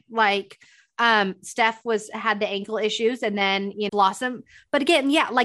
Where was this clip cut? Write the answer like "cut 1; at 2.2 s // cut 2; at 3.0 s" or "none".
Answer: cut 1; at 3.9 s